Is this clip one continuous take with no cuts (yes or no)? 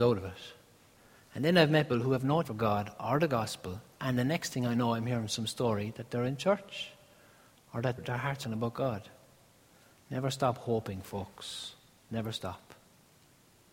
no